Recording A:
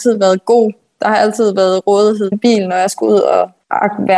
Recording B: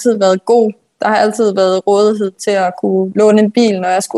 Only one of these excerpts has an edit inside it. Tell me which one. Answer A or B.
A